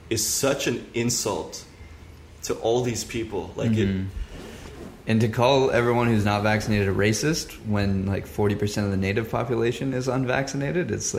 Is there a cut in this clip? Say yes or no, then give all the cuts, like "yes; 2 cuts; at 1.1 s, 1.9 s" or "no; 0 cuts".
no; 0 cuts